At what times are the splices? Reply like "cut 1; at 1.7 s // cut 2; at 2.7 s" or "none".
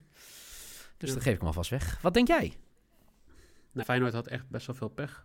cut 1; at 3.8 s